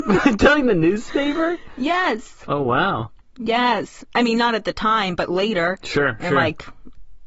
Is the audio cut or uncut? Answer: cut